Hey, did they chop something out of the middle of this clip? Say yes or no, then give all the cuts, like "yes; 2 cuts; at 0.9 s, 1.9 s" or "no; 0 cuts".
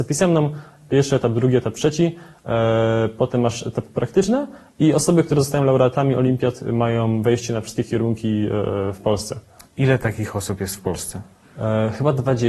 no; 0 cuts